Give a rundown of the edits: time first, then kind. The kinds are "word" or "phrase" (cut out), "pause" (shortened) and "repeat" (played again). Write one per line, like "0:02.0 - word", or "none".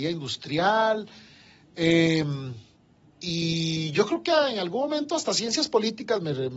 none